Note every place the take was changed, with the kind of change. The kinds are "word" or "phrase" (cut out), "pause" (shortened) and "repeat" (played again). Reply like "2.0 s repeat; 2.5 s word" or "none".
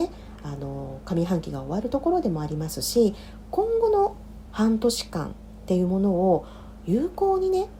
4.5 s word